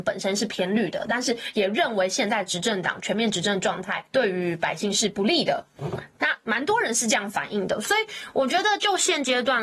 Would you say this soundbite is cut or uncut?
cut